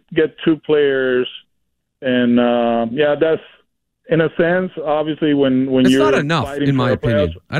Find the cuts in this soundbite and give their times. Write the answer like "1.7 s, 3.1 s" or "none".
3.9 s